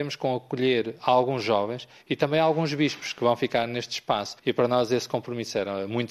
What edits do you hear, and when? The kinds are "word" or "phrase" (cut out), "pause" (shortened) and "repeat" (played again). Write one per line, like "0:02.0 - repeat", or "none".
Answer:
0:04.4 - pause